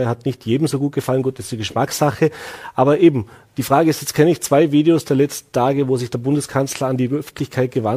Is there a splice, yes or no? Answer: no